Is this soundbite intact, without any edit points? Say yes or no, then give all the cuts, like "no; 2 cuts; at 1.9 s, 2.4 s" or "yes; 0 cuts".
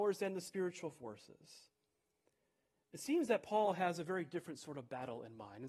yes; 0 cuts